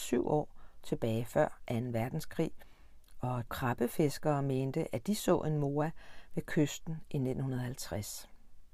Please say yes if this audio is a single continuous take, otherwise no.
no